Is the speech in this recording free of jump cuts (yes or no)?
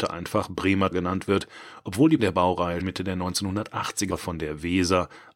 no